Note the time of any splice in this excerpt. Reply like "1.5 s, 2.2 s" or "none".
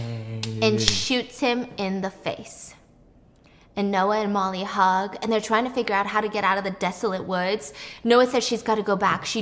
none